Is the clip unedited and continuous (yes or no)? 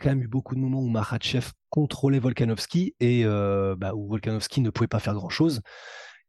yes